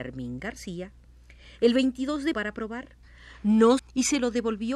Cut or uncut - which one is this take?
cut